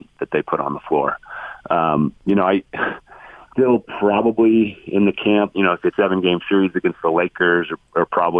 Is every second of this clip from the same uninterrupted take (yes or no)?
no